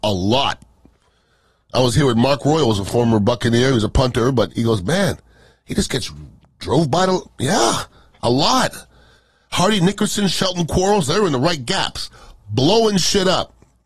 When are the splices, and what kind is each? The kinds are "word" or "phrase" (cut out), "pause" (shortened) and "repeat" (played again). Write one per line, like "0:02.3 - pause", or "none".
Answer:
0:04.5 - word